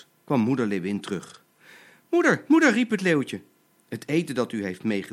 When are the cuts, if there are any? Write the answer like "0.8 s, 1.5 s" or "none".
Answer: none